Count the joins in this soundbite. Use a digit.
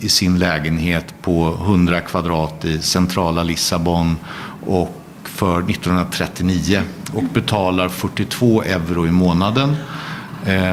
0